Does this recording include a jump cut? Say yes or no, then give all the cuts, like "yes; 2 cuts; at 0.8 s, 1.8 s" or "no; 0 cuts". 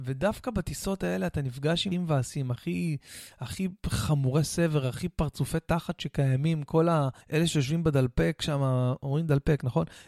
yes; 2 cuts; at 1.9 s, 7.2 s